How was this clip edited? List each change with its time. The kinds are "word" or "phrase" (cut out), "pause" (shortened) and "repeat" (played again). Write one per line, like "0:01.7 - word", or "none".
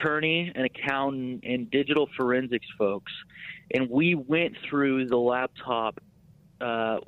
none